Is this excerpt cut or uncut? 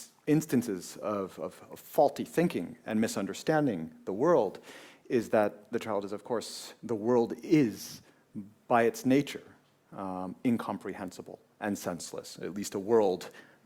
uncut